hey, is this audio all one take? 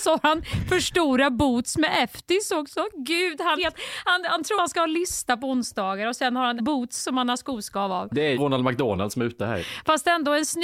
no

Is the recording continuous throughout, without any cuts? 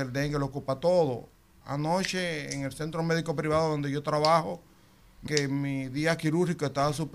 no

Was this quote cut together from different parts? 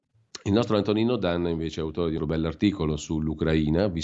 yes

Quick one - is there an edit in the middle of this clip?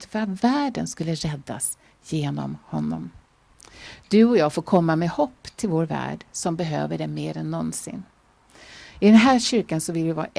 no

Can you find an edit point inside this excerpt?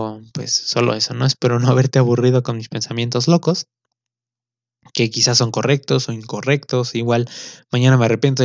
no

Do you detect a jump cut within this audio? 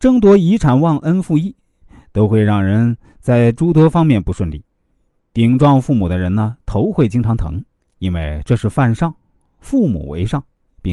no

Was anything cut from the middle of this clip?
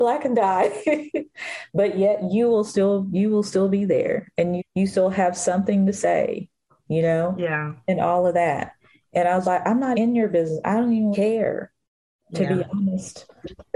yes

